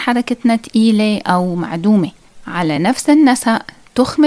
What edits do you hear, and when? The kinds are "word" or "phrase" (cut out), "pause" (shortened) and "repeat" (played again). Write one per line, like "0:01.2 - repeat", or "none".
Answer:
none